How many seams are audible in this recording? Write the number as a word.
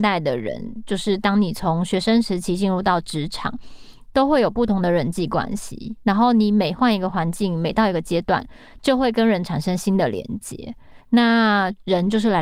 one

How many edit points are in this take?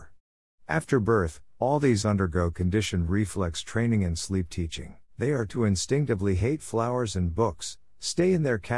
three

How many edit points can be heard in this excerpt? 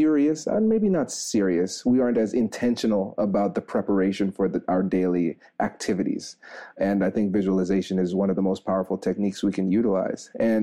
zero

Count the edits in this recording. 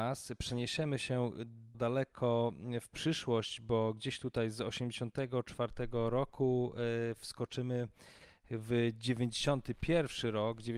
one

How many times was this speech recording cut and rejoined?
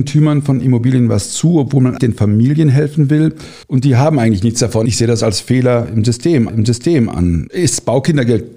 three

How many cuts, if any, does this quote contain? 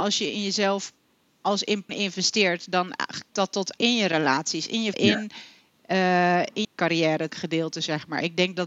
six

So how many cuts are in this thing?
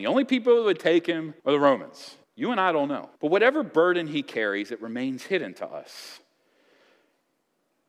three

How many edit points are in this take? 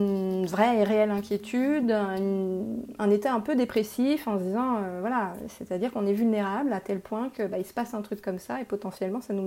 zero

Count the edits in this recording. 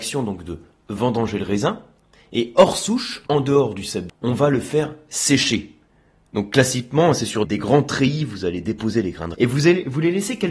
four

